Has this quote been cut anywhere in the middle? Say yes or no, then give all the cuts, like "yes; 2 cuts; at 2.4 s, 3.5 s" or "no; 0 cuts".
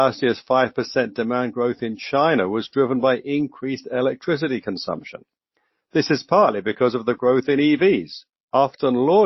no; 0 cuts